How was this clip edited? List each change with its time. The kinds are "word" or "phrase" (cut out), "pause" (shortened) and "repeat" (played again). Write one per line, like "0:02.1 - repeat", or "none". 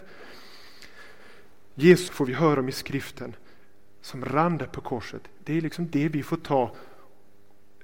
0:02.1 - word